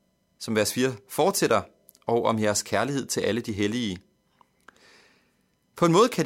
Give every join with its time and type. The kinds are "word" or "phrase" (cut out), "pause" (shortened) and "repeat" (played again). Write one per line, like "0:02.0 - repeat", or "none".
none